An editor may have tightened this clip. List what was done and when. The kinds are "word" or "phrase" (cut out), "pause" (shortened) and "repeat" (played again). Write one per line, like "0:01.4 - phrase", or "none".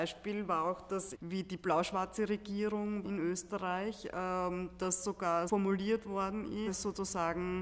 0:01.1 - word
0:03.0 - word
0:05.5 - word
0:06.7 - phrase